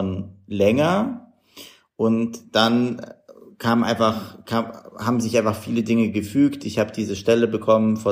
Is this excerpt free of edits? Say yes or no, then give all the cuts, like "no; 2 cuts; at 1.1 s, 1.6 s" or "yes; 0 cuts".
yes; 0 cuts